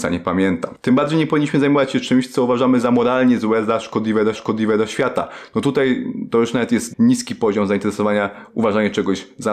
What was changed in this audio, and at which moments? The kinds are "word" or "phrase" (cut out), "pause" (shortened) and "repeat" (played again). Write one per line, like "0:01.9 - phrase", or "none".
0:04.3 - repeat
0:06.9 - phrase